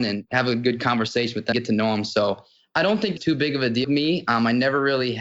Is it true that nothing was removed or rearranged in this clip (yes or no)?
no